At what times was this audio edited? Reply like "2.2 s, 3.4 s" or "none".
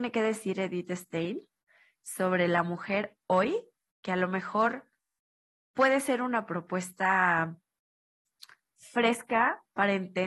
none